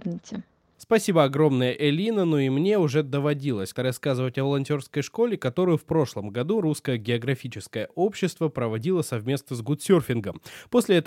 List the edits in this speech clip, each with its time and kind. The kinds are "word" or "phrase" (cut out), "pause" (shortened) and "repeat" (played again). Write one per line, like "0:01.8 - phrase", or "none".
0:03.7 - word